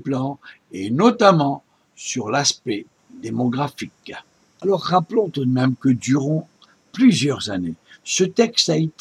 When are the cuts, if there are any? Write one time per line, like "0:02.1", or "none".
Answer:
none